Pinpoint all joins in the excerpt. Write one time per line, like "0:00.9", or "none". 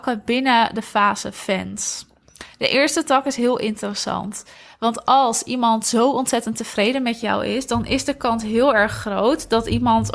none